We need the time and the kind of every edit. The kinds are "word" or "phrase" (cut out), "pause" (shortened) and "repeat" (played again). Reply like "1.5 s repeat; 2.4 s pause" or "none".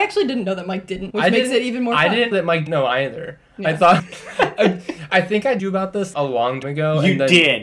1.1 s word; 2.3 s word; 2.7 s word; 4.0 s word; 5.1 s word; 5.6 s word; 6.1 s word; 6.6 s word